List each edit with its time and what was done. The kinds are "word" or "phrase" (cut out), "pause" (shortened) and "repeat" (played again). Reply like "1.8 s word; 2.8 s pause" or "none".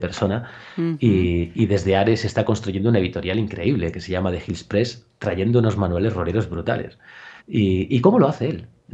7.4 s pause

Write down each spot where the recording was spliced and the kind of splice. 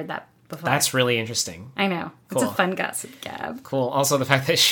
none

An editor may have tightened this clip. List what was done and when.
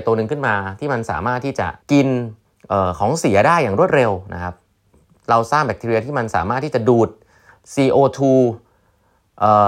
1.8 s pause; 2.4 s pause

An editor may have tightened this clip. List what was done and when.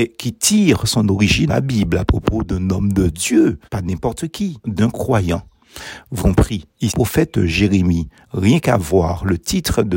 1.5 s word; 3.7 s pause; 4.6 s word; 6.2 s word; 6.9 s phrase

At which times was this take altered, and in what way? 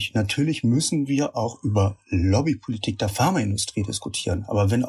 none

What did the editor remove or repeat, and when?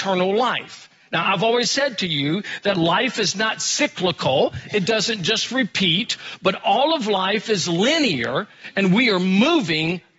none

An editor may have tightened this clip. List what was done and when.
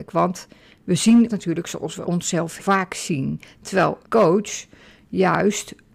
1.3 s word; 2.0 s word; 2.6 s word; 4.0 s word

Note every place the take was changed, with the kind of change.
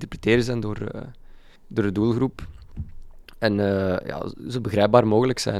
1.6 s pause

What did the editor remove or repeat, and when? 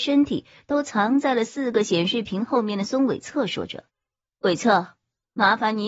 3.9 s pause

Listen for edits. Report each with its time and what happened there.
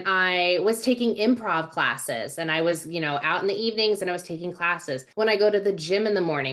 5.1 s pause

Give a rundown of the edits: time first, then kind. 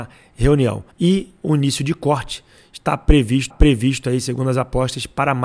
0.9 s pause; 3.5 s repeat

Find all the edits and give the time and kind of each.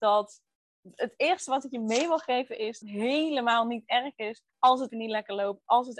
2.8 s phrase; 4.5 s pause; 4.9 s word

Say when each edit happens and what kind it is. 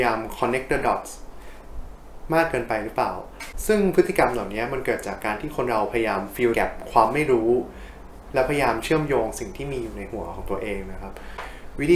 6.5 s word

